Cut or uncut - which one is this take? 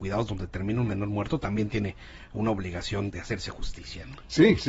cut